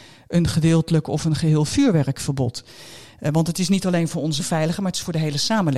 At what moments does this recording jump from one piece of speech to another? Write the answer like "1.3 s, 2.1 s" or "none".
4.4 s